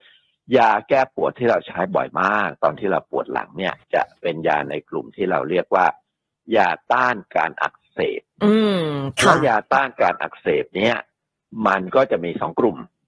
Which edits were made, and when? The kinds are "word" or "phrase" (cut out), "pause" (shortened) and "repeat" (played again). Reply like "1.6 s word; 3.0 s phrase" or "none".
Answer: 3.8 s pause